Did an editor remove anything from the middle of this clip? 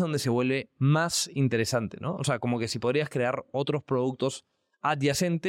no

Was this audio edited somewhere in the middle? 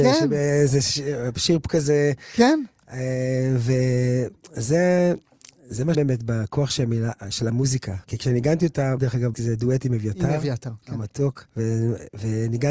yes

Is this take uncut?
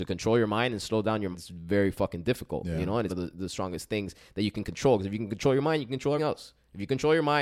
no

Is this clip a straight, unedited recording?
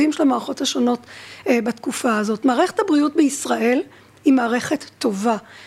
yes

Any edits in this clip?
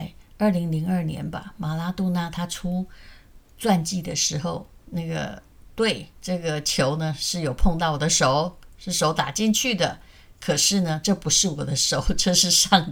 yes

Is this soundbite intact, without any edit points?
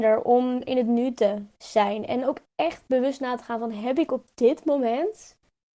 yes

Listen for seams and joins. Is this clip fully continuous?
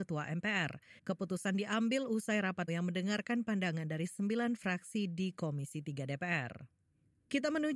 no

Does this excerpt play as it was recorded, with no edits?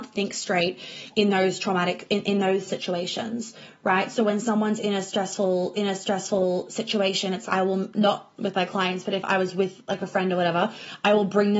no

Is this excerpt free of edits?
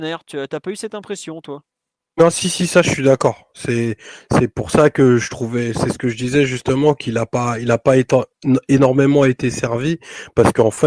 yes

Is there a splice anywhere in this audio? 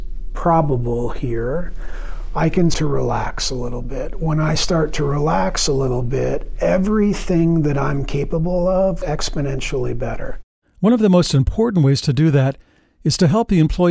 yes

